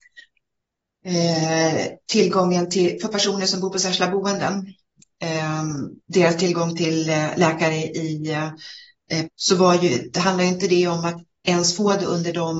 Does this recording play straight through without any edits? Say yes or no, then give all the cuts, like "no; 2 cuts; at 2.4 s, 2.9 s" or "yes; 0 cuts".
no; 2 cuts; at 6.0 s, 9.3 s